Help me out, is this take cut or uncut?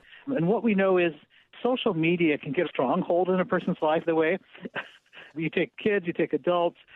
cut